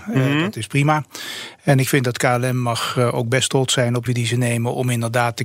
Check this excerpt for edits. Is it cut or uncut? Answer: cut